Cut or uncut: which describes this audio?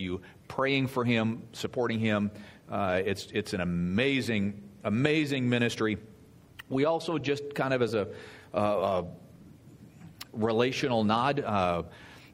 uncut